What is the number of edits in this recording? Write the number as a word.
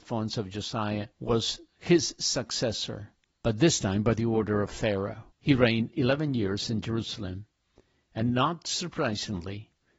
three